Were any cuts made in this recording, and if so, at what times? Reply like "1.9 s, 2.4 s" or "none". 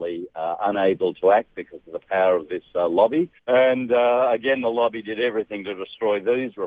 3.4 s